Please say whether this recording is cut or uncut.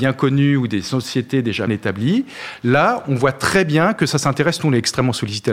cut